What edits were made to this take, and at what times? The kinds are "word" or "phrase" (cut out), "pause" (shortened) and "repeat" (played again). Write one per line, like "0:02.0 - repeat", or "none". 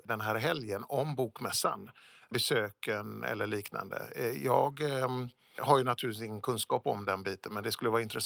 none